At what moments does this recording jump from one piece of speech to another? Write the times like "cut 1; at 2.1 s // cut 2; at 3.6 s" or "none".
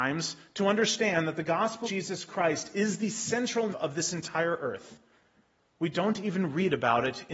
cut 1; at 1.8 s // cut 2; at 3.7 s